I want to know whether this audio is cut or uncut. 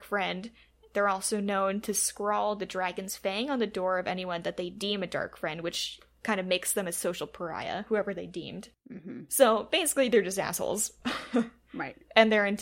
cut